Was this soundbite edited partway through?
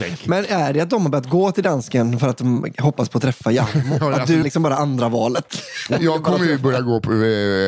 yes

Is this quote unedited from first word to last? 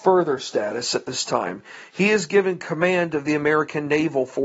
yes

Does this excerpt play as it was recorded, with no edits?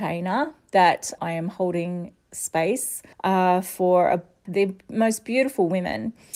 no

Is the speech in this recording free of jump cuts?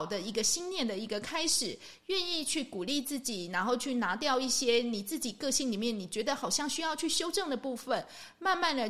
yes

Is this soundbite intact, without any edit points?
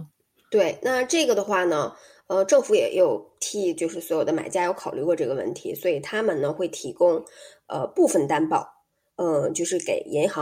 yes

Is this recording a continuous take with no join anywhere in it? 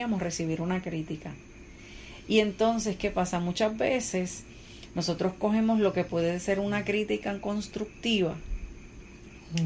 yes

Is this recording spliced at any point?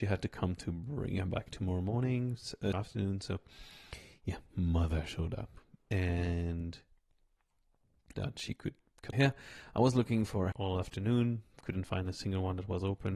yes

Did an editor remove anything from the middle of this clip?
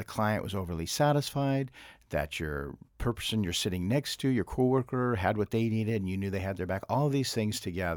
yes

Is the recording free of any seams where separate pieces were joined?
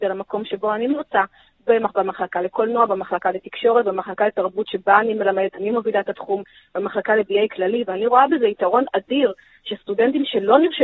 yes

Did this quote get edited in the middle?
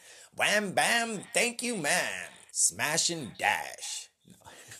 yes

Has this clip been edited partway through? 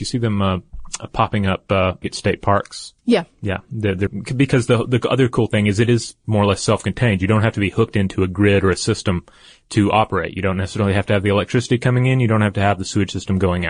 yes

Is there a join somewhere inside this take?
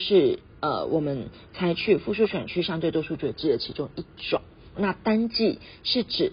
yes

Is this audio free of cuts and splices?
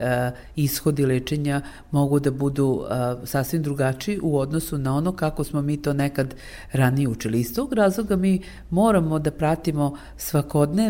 yes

